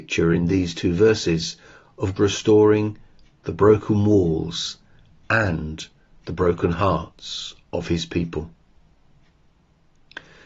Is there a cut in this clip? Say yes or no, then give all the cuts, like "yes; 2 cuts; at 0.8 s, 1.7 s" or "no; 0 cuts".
yes; 1 cut; at 2.2 s